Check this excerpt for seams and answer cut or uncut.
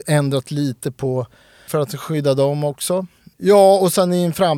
cut